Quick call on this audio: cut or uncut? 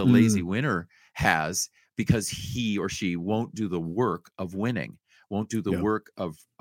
uncut